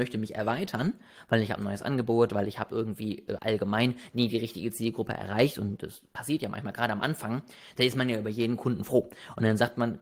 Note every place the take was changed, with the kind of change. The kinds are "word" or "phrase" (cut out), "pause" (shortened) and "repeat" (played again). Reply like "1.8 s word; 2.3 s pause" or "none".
3.4 s word